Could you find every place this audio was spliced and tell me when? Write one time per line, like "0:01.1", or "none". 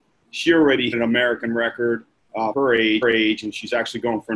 0:00.9
0:02.5
0:03.0